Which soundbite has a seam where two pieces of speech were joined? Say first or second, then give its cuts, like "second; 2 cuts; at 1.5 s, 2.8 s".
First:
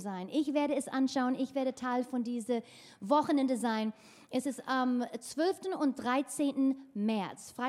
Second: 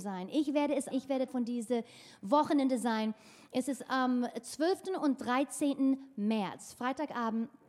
second; 2 cuts; at 0.9 s, 1.3 s